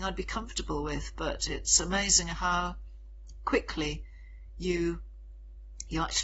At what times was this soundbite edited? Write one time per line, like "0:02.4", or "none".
none